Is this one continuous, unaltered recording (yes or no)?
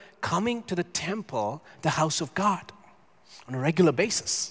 yes